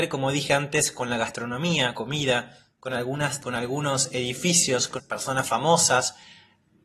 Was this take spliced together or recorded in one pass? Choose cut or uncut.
cut